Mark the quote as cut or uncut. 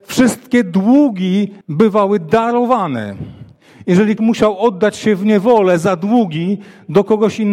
cut